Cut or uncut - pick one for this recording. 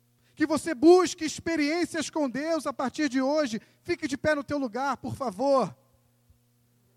uncut